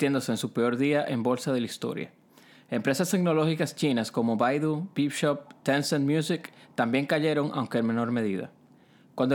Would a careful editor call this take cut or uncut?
uncut